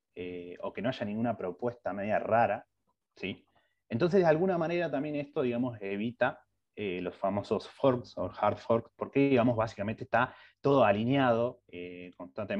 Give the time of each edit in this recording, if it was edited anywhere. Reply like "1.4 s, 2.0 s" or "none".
none